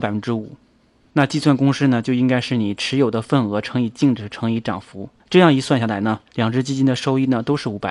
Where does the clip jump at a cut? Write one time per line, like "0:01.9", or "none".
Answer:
0:05.2
0:06.3